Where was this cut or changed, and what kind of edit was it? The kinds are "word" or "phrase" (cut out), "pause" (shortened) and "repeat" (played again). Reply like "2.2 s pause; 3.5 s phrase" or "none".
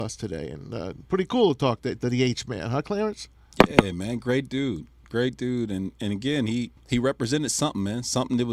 6.8 s pause